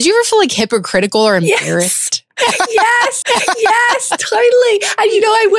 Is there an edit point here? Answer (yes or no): yes